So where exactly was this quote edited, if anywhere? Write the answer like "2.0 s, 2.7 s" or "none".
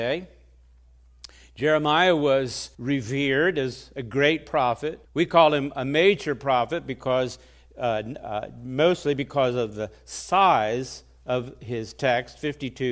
2.7 s, 5.0 s